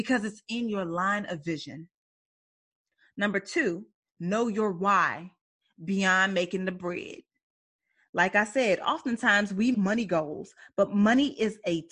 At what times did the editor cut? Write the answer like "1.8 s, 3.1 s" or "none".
9.7 s